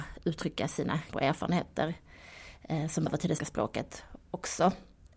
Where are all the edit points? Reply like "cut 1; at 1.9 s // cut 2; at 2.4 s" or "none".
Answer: cut 1; at 1.1 s // cut 2; at 3.1 s // cut 3; at 3.4 s